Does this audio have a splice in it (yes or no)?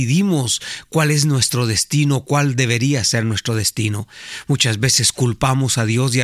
no